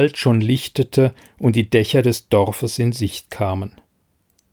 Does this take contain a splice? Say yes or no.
no